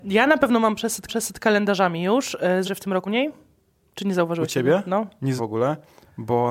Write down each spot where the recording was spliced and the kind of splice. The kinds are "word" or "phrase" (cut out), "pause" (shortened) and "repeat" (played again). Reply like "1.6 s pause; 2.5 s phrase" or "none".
1.1 s repeat; 2.6 s word; 3.1 s word; 5.4 s word